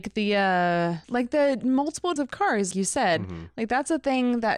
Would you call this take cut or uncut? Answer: cut